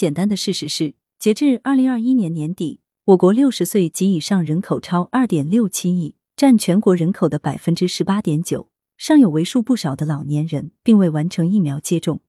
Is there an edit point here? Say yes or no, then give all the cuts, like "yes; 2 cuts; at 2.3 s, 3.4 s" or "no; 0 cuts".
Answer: no; 0 cuts